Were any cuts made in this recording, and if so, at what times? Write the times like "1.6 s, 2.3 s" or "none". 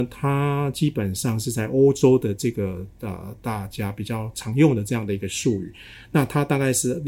none